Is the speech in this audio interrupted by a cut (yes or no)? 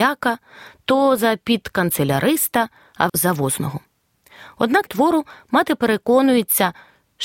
yes